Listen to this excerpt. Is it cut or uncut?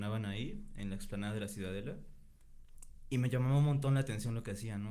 uncut